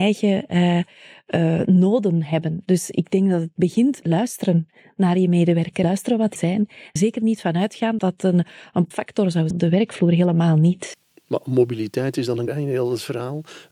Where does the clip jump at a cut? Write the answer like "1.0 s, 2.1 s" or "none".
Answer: 4.0 s, 5.8 s, 6.4 s, 7.0 s, 8.0 s, 8.9 s, 9.5 s, 12.5 s